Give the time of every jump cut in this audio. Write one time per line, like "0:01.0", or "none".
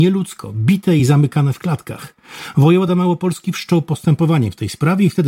none